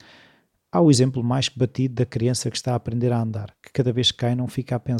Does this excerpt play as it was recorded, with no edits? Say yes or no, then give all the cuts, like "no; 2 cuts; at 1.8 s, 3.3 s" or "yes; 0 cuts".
yes; 0 cuts